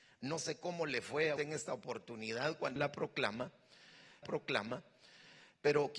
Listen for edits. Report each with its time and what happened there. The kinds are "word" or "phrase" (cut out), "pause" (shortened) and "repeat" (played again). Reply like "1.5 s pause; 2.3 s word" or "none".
1.4 s word; 2.8 s word; 4.2 s repeat